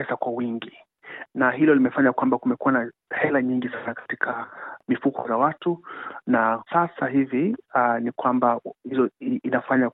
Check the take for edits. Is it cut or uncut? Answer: cut